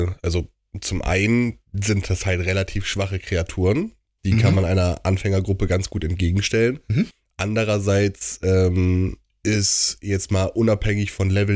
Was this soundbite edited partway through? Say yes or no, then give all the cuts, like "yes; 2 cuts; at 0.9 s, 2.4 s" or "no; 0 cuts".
yes; 1 cut; at 9.3 s